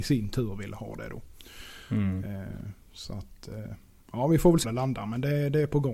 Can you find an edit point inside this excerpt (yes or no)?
yes